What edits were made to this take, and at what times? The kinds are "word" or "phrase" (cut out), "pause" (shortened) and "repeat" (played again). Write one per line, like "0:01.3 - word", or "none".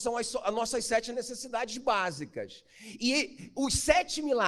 none